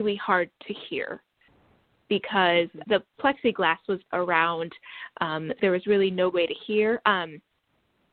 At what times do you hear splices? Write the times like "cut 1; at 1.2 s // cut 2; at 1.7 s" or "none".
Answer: cut 1; at 2.8 s // cut 2; at 4.1 s // cut 3; at 5.6 s // cut 4; at 6.3 s

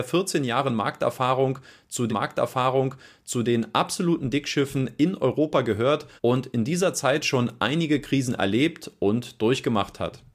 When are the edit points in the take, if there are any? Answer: cut 1; at 2.1 s // cut 2; at 6.2 s

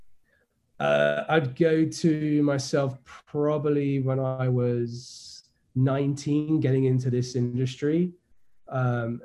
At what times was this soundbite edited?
none

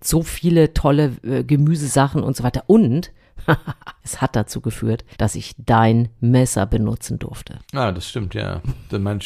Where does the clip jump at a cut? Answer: cut 1; at 4.0 s // cut 2; at 5.1 s // cut 3; at 7.6 s

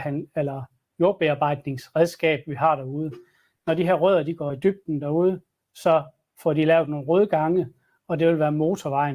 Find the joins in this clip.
none

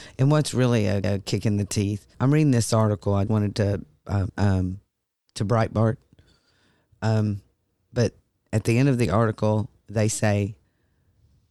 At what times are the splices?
cut 1; at 1.0 s // cut 2; at 2.1 s // cut 3; at 3.3 s // cut 4; at 4.3 s

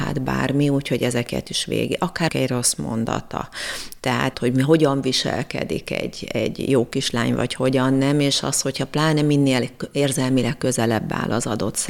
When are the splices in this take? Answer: cut 1; at 2.3 s // cut 2; at 4.3 s

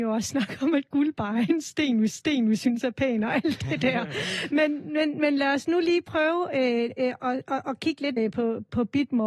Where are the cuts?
cut 1; at 2.1 s // cut 2; at 8.2 s

